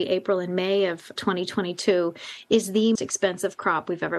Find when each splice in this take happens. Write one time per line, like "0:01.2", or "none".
0:01.2
0:03.0